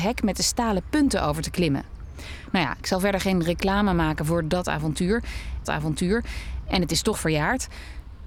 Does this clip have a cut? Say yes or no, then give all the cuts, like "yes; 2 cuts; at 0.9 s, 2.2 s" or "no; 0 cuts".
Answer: yes; 1 cut; at 5.6 s